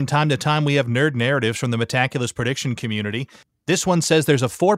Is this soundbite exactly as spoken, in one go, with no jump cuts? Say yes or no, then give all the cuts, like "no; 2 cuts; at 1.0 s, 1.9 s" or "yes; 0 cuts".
yes; 0 cuts